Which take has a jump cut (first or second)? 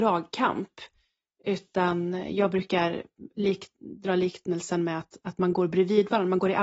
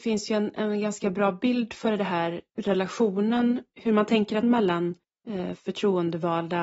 second